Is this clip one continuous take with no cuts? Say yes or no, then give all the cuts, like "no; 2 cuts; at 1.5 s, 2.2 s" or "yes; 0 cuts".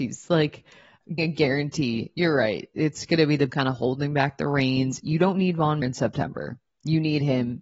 no; 3 cuts; at 1.2 s, 3.5 s, 5.8 s